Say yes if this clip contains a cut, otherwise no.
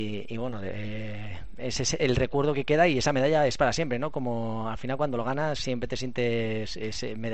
no